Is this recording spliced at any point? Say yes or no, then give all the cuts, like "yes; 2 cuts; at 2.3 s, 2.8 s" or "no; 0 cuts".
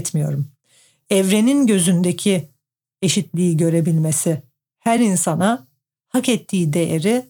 no; 0 cuts